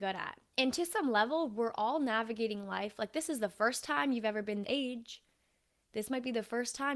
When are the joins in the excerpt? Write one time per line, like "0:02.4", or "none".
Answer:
0:04.6